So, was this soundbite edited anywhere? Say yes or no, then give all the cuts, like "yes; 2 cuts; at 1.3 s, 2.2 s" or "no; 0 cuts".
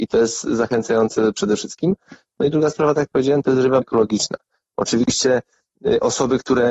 yes; 1 cut; at 3.8 s